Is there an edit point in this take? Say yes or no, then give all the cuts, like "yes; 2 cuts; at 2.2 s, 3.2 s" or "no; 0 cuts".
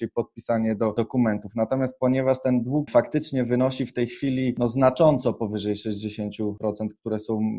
no; 0 cuts